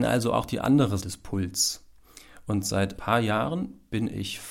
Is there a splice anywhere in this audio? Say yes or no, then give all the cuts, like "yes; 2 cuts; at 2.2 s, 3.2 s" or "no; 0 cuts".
yes; 2 cuts; at 1.0 s, 3.0 s